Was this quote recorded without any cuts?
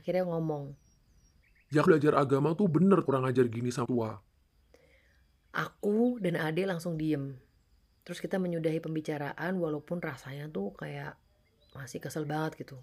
no; 3 cuts; at 1.9 s, 3.1 s, 3.8 s

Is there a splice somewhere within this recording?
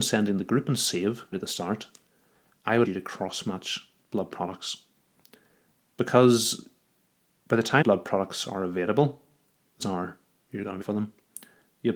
yes; 5 cuts; at 1.3 s, 2.8 s, 7.8 s, 9.8 s, 10.8 s

